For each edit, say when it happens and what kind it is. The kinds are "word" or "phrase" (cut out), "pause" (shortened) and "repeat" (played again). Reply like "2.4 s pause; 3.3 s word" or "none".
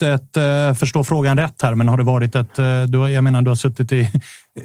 none